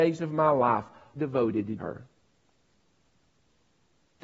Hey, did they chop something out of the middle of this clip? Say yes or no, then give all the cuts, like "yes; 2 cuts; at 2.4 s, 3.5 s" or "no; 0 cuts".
yes; 2 cuts; at 1.2 s, 1.8 s